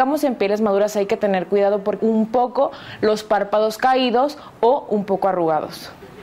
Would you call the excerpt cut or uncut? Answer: cut